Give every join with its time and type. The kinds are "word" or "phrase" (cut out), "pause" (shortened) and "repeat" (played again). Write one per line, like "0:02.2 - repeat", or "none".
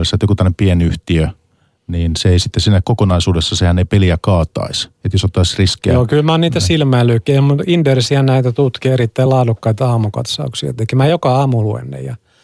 none